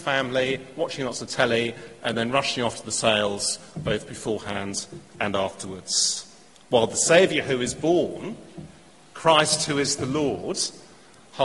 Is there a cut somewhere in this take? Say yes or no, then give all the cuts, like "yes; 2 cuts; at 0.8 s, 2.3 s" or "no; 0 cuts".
no; 0 cuts